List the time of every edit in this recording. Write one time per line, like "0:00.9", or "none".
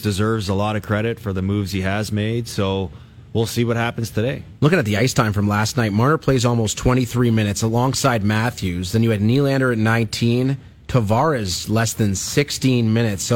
none